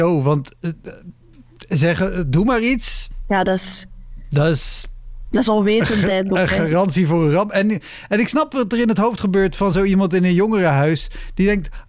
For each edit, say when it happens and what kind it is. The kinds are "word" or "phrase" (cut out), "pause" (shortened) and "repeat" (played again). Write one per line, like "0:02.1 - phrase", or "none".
none